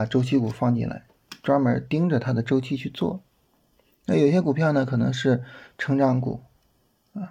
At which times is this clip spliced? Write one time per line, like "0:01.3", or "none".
none